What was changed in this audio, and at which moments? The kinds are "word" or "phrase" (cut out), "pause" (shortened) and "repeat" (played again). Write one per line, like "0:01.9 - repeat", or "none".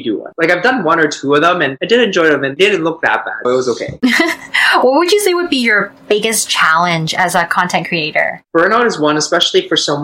0:03.4 - word